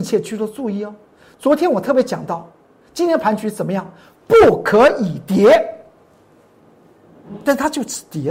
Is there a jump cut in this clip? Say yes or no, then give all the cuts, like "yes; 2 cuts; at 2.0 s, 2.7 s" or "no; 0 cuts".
no; 0 cuts